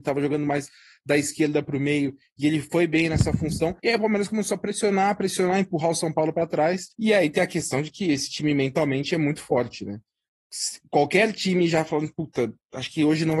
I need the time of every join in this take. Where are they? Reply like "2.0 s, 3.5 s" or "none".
3.8 s, 6.9 s